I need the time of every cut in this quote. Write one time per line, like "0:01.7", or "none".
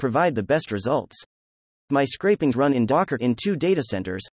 0:02.5
0:03.2